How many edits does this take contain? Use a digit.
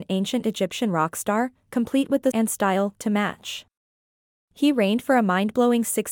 1